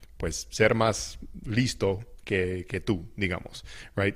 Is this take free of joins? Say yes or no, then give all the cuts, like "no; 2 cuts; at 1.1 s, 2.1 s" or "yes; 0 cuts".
yes; 0 cuts